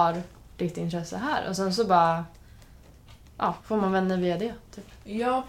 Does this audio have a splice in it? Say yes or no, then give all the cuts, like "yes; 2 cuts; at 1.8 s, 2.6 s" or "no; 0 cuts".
yes; 1 cut; at 3.6 s